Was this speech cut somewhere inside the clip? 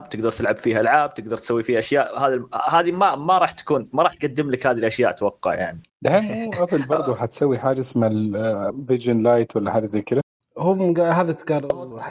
no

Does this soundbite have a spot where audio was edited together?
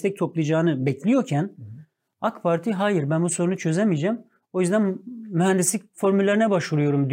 no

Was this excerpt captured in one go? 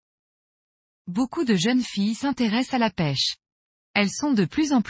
yes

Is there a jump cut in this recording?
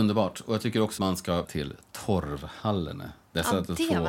yes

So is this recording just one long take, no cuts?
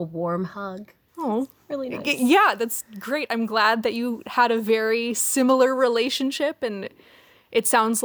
yes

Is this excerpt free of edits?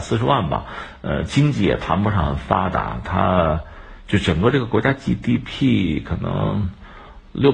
yes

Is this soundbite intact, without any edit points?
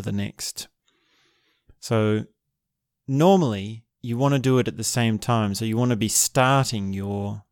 no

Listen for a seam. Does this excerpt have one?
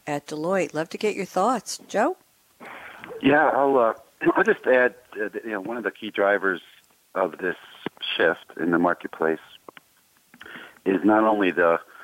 no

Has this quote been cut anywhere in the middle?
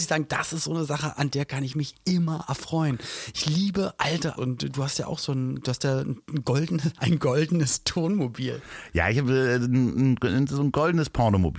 yes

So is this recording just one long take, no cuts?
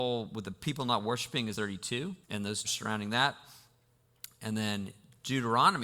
no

